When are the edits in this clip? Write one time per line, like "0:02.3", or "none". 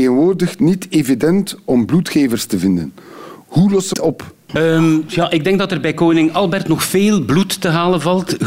0:03.9